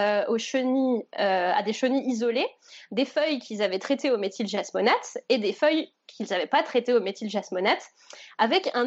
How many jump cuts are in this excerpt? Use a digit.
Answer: 0